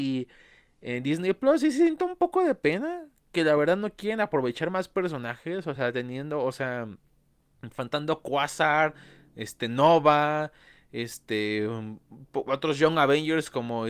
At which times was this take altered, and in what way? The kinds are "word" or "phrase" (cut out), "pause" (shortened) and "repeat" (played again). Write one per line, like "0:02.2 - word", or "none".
none